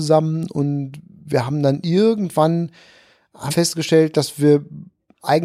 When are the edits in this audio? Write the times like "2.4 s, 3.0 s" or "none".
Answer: 3.5 s